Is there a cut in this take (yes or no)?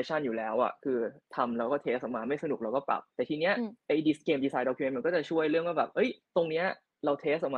yes